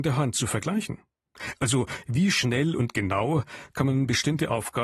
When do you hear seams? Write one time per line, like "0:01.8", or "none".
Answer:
none